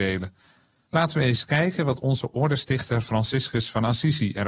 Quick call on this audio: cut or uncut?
uncut